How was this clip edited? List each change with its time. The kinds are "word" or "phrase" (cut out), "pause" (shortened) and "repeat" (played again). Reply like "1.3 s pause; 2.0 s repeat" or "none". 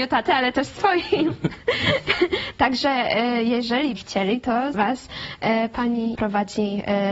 4.0 s word; 4.7 s word; 6.1 s word